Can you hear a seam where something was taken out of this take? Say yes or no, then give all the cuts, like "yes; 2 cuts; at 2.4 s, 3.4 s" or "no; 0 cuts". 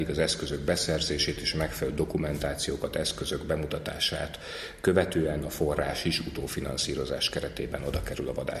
no; 0 cuts